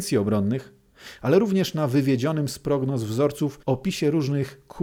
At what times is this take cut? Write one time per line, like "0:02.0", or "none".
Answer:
0:03.6